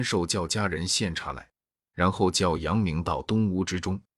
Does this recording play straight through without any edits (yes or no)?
yes